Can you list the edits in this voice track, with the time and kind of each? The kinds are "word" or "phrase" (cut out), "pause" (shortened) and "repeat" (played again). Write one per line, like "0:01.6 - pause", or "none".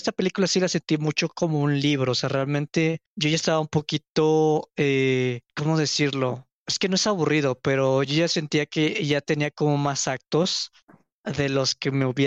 0:03.1 - pause
0:05.5 - pause